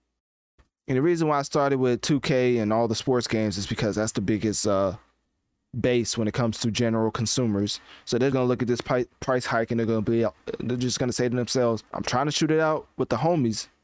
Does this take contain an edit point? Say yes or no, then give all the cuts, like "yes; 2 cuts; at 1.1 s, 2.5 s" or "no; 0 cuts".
yes; 2 cuts; at 8.3 s, 11.9 s